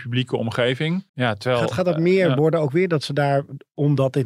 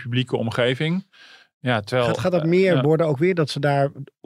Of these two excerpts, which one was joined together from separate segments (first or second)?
first